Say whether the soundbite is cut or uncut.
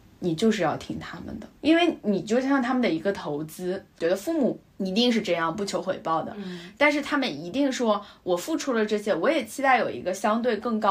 cut